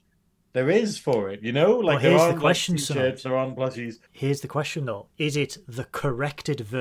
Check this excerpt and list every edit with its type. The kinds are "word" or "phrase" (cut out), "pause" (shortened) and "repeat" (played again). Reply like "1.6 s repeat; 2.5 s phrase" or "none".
4.1 s pause